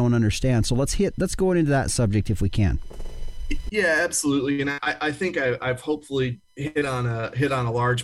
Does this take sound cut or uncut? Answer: uncut